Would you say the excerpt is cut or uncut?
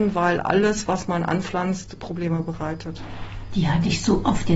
uncut